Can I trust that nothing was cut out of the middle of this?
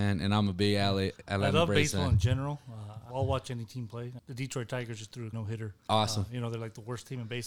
no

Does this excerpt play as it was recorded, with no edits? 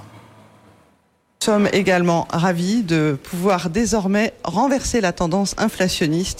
yes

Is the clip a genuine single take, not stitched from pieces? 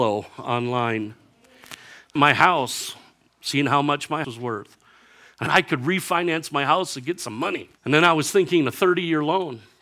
no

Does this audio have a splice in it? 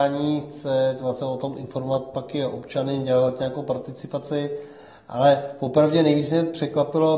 no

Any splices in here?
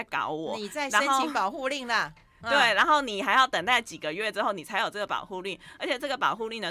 no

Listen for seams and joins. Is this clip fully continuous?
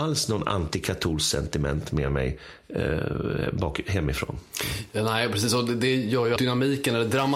no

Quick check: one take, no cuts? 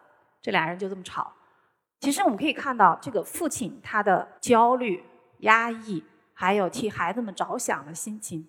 no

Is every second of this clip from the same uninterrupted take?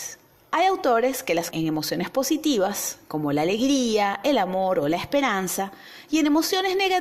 no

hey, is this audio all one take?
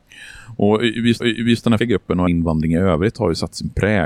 no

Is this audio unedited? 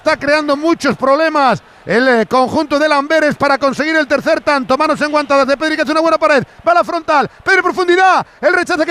yes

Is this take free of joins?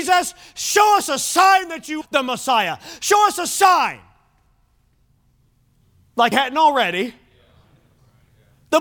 no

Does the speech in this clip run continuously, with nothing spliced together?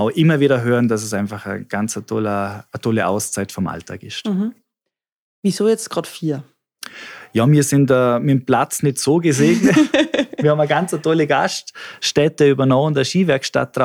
yes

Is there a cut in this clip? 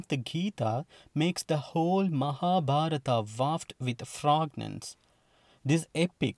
no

